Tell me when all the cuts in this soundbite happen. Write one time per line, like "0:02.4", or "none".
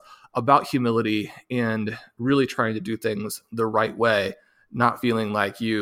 none